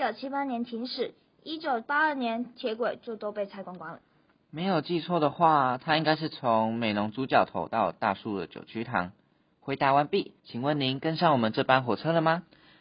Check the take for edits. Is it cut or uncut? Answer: cut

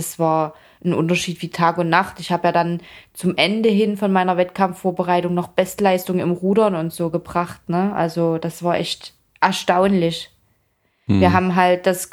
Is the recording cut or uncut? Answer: uncut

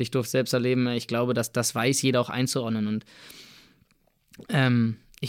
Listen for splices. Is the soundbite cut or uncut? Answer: uncut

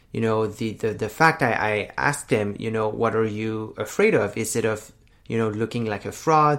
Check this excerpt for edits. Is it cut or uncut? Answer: uncut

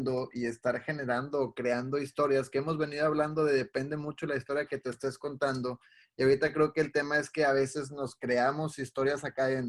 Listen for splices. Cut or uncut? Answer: uncut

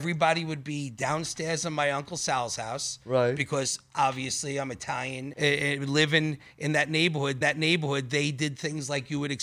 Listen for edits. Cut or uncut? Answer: cut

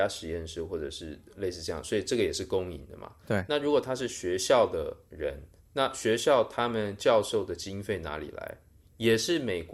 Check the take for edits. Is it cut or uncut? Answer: uncut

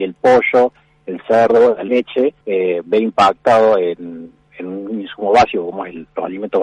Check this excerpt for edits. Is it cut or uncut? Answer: cut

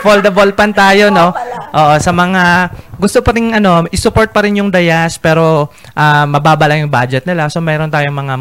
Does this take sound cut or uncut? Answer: uncut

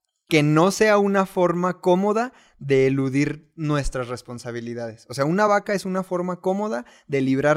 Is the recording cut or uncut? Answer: uncut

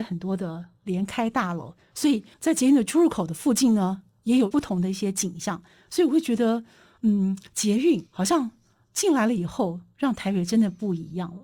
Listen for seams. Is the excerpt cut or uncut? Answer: cut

